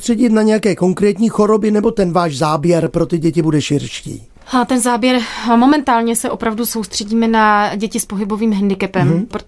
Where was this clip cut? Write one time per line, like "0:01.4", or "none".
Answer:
none